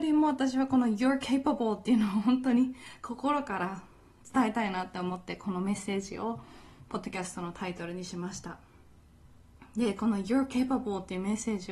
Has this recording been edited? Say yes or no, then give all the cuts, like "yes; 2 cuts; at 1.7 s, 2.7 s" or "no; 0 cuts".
no; 0 cuts